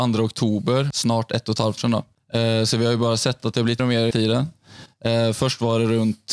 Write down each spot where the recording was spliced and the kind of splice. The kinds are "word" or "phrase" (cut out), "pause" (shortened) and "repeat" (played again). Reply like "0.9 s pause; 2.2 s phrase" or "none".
1.8 s word; 3.8 s word; 4.1 s word